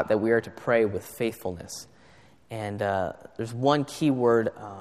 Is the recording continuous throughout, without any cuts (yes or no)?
yes